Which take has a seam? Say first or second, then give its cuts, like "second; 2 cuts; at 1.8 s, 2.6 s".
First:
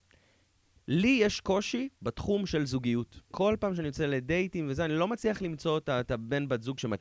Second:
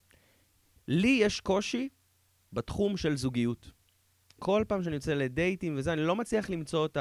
first; 2 cuts; at 2.0 s, 3.2 s